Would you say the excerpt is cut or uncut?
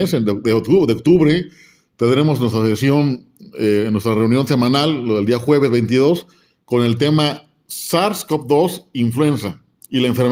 uncut